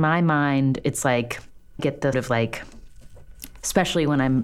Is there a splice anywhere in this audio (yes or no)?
yes